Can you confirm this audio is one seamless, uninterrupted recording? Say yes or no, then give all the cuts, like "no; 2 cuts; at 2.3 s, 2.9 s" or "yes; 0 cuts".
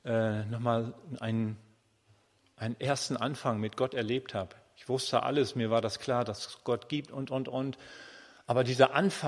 yes; 0 cuts